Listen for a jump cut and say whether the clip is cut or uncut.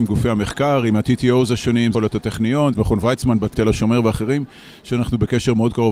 cut